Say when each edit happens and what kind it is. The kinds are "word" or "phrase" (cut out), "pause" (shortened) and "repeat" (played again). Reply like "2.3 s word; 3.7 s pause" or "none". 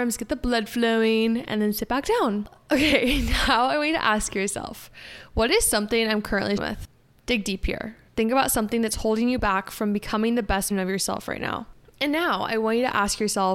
6.6 s word; 8.1 s pause; 10.7 s word